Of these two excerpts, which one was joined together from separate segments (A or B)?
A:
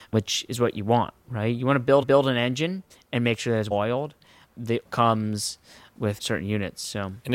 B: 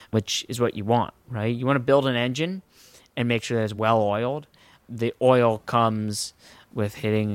A